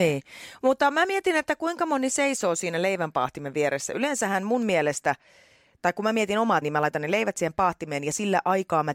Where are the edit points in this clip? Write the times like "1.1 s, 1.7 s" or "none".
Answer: 6.6 s